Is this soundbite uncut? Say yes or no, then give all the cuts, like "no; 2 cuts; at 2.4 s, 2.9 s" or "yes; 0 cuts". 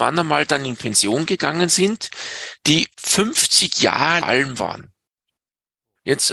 no; 2 cuts; at 2.9 s, 4.2 s